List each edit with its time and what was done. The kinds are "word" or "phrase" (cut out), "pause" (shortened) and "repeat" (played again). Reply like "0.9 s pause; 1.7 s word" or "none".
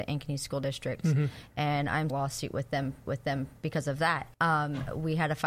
2.1 s phrase; 3.1 s repeat; 4.3 s pause